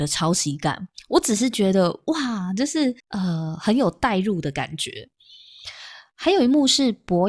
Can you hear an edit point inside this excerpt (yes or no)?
yes